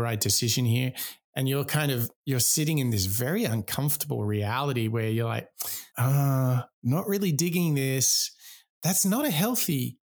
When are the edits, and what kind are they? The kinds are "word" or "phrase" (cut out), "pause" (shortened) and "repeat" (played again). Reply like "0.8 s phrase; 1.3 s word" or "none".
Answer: 2.2 s pause; 5.9 s pause